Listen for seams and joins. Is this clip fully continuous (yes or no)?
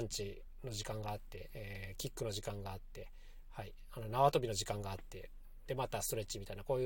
yes